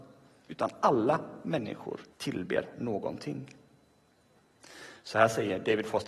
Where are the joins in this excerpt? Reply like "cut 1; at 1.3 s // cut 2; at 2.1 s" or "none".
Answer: cut 1; at 2.1 s